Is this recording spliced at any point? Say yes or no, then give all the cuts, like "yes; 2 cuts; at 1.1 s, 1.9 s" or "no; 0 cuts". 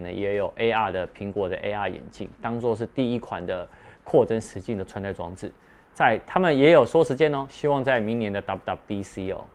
no; 0 cuts